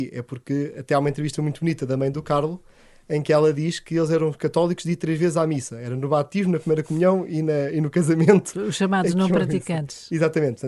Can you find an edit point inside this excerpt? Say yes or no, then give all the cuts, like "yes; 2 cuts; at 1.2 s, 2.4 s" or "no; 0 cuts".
no; 0 cuts